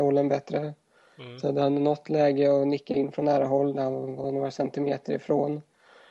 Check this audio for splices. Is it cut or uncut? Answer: uncut